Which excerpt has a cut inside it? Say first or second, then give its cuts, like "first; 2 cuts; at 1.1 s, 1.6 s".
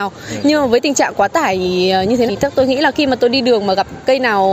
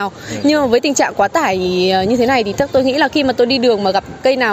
first; 1 cut; at 2.3 s